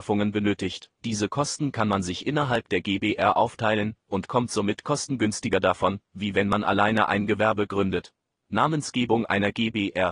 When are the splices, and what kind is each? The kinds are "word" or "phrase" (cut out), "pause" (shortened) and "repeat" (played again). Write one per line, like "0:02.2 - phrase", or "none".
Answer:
0:00.9 - pause

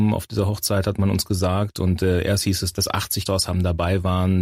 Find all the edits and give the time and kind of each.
0:03.3 - word

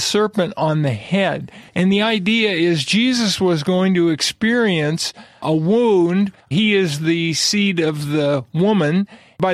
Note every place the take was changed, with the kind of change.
0:01.7 - pause
0:06.4 - pause

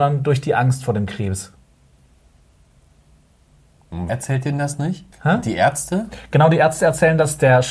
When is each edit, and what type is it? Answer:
0:04.1 - word
0:05.1 - pause

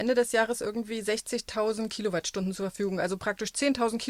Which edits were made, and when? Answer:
none

